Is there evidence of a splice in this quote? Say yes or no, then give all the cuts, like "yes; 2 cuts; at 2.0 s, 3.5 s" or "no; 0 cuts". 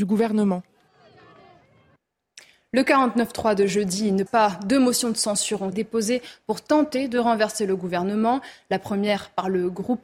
yes; 2 cuts; at 4.3 s, 5.7 s